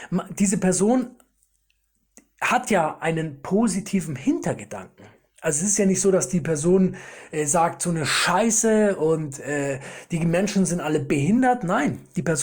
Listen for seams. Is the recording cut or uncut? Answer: uncut